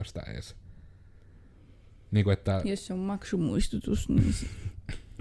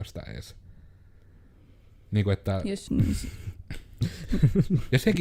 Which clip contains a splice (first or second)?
second